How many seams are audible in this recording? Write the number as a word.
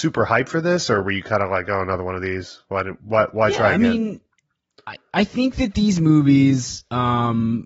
zero